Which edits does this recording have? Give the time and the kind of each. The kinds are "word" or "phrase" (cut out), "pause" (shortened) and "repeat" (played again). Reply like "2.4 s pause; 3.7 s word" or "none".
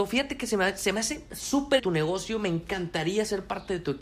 1.8 s word